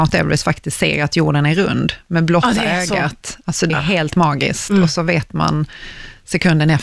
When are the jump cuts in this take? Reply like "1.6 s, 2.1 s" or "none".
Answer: 3.7 s